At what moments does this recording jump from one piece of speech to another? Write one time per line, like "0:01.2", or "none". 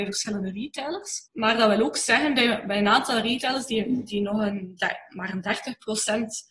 0:01.3